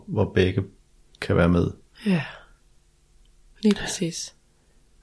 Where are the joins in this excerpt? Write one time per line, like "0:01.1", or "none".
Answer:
none